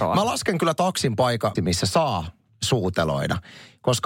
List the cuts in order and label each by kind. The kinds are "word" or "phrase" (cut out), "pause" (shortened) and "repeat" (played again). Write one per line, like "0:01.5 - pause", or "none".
0:01.5 - word